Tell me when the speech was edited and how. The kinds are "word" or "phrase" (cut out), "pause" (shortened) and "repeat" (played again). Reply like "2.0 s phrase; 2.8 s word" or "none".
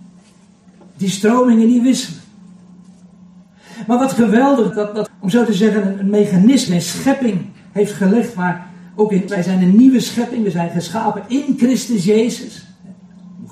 4.7 s word; 5.1 s word; 6.7 s word; 9.3 s word